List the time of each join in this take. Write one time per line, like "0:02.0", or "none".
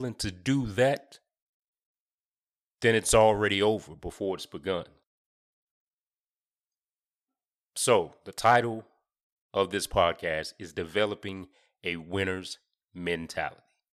none